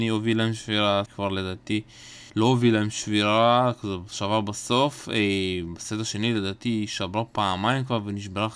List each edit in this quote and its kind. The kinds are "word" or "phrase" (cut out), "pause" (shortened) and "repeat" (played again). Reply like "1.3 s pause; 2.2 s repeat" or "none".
1.1 s phrase; 2.3 s pause